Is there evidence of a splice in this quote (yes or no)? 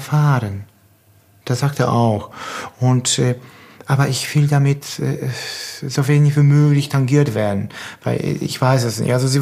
no